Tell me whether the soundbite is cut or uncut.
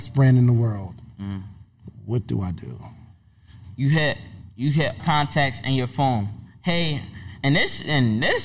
cut